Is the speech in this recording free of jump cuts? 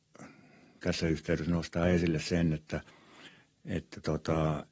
yes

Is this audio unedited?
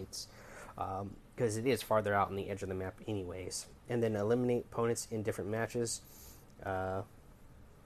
yes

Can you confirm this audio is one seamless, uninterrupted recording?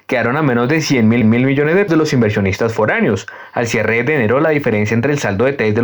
no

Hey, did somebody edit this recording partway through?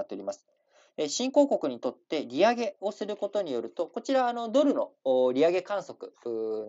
no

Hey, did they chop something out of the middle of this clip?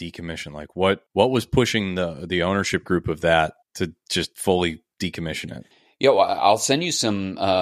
yes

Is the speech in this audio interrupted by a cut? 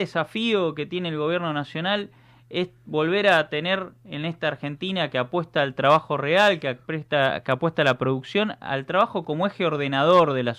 no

